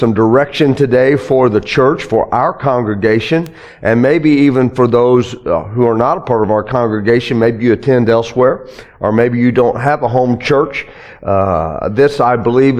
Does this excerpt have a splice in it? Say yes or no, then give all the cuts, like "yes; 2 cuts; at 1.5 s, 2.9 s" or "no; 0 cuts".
no; 0 cuts